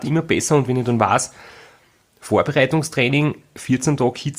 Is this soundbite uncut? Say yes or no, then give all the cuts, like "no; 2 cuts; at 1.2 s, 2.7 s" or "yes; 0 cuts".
yes; 0 cuts